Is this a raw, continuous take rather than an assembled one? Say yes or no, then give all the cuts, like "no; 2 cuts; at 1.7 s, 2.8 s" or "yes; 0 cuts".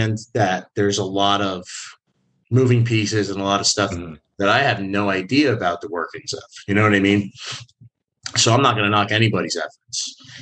yes; 0 cuts